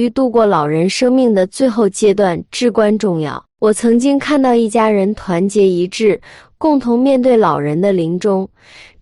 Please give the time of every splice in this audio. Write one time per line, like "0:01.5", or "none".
none

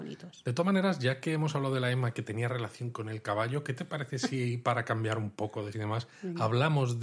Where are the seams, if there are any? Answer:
0:05.7

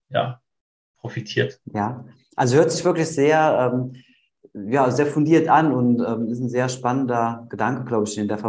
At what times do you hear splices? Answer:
0:01.6

